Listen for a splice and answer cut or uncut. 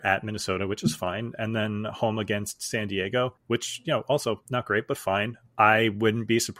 cut